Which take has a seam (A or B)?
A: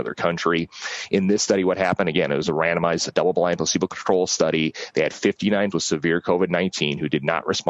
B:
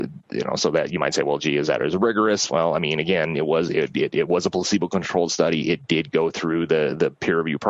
A